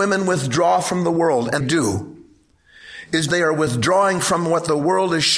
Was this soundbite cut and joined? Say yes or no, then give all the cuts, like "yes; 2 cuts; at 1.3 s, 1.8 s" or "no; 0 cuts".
yes; 2 cuts; at 1.6 s, 3.3 s